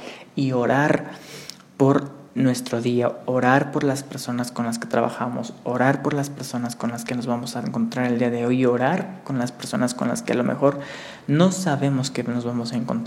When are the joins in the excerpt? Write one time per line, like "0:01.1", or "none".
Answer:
none